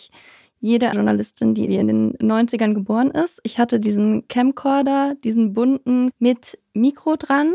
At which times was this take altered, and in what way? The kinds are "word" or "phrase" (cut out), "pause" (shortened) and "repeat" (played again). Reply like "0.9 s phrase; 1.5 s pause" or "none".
0.9 s word; 1.7 s word; 6.1 s word